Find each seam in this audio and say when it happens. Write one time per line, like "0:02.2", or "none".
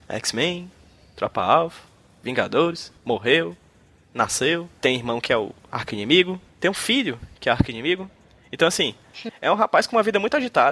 0:03.0
0:06.5